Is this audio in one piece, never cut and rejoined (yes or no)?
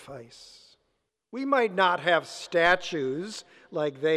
no